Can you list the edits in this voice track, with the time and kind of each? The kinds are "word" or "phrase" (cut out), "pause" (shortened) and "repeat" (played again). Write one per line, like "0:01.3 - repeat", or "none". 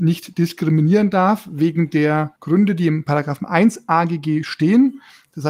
0:02.4 - pause

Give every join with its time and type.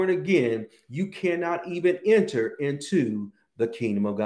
none

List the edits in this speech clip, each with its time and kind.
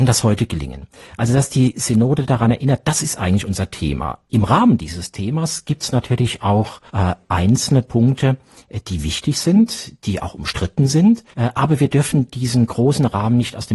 0:06.9 - pause
0:11.3 - pause

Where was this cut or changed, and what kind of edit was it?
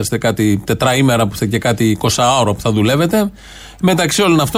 0:01.4 - word

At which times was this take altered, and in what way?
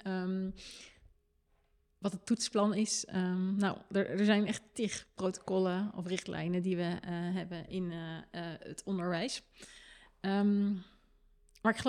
none

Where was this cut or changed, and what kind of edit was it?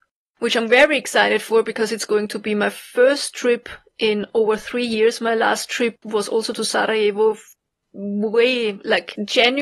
none

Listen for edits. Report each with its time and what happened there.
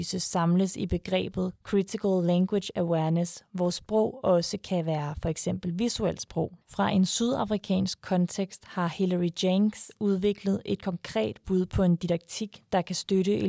0:06.6 - pause

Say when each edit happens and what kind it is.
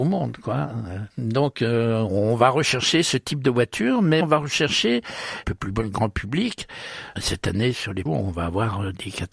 0:01.1 - pause
0:04.2 - word
0:05.4 - phrase
0:08.1 - word

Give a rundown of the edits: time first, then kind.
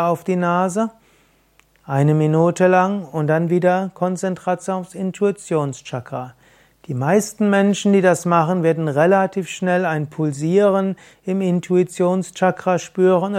none

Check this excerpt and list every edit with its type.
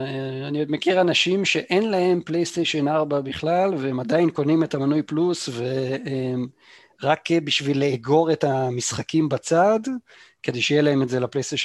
none

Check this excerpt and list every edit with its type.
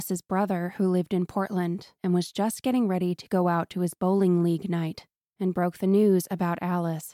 none

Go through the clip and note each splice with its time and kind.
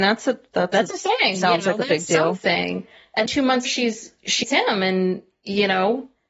0:03.3 - word
0:03.6 - word
0:04.4 - word

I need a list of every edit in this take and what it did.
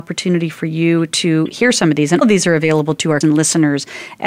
0:02.2 - word
0:03.2 - word

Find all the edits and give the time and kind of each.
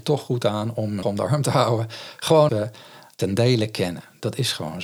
0:01.0 - word
0:02.5 - word
0:03.1 - word

